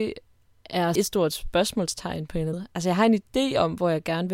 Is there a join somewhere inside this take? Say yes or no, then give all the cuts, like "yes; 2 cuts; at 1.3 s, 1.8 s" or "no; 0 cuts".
yes; 2 cuts; at 0.9 s, 2.5 s